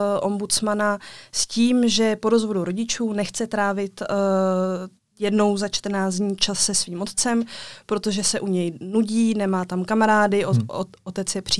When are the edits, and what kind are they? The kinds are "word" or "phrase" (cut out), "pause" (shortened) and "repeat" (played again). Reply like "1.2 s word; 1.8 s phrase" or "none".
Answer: 5.0 s pause